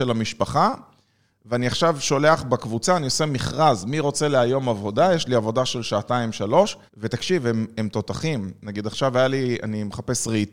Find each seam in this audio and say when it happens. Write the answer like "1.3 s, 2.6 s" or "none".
6.9 s